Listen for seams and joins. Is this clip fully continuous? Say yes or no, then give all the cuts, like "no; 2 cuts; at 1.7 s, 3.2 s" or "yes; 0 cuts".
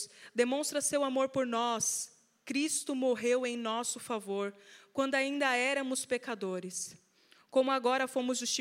yes; 0 cuts